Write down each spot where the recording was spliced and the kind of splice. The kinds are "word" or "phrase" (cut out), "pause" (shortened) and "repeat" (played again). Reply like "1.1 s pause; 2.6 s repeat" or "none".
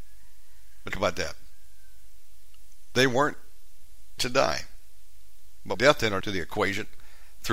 0.9 s word; 4.2 s word; 5.7 s word; 6.2 s word